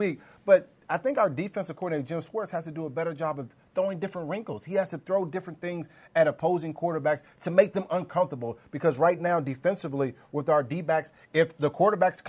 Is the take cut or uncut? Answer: uncut